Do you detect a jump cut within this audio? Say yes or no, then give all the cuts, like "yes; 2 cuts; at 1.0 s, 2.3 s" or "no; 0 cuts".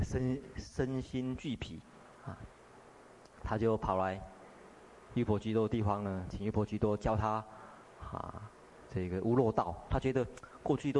no; 0 cuts